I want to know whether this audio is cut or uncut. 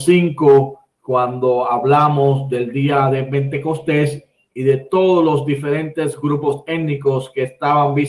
uncut